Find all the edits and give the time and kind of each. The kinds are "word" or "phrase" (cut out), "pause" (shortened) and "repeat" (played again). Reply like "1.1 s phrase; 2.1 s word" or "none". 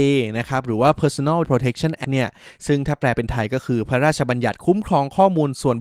1.4 s word; 2.0 s word

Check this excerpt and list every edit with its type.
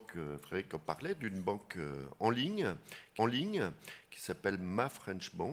3.2 s repeat

